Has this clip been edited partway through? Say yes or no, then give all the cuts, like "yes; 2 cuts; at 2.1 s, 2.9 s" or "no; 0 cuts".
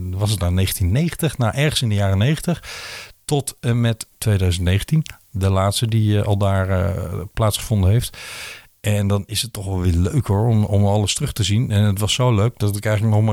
no; 0 cuts